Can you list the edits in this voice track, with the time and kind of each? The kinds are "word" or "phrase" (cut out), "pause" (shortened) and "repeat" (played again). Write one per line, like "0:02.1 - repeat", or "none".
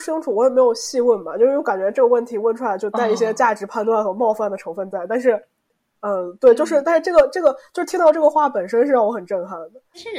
none